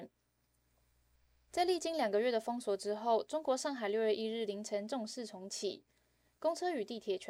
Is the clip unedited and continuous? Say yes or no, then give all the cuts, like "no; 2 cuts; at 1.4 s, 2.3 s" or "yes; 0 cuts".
no; 1 cut; at 1.1 s